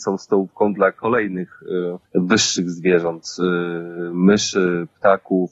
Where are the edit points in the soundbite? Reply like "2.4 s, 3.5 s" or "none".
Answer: 2.0 s